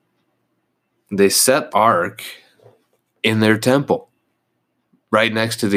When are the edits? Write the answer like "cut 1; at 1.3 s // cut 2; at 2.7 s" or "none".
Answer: cut 1; at 1.7 s

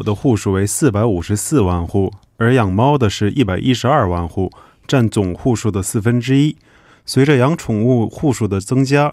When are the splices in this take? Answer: none

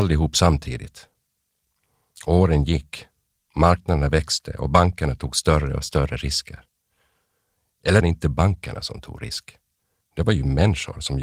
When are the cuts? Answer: cut 1; at 8.0 s

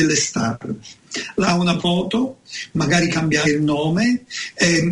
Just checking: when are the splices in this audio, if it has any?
cut 1; at 1.4 s // cut 2; at 1.8 s // cut 3; at 3.4 s

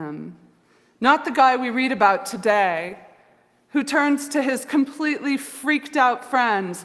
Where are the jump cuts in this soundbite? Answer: none

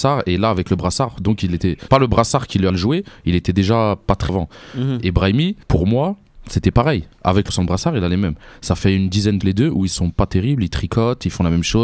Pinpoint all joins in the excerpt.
cut 1; at 1.9 s // cut 2; at 2.7 s // cut 3; at 4.3 s // cut 4; at 5.6 s // cut 5; at 7.1 s // cut 6; at 7.5 s // cut 7; at 9.4 s

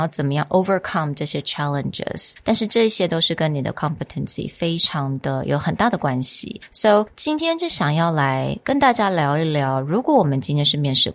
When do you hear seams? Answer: cut 1; at 3.7 s

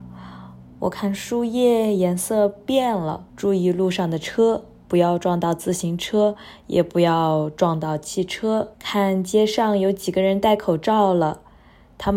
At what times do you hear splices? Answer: cut 1; at 3.3 s // cut 2; at 8.7 s

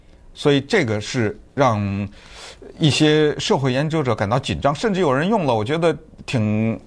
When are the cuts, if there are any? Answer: cut 1; at 1.5 s

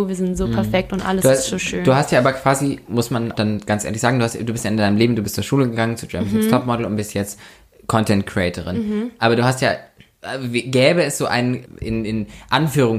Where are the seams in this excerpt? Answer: cut 1; at 3.3 s

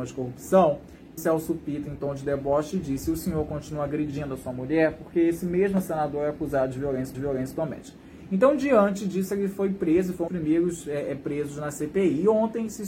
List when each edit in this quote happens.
cut 1; at 1.2 s // cut 2; at 7.1 s // cut 3; at 10.3 s

